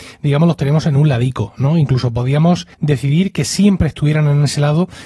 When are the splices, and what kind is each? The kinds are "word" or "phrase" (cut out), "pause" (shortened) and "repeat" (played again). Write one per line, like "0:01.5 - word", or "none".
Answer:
0:02.7 - pause